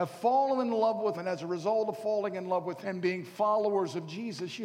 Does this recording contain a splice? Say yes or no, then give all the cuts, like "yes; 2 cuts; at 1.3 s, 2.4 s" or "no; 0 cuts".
yes; 2 cuts; at 1.1 s, 2.8 s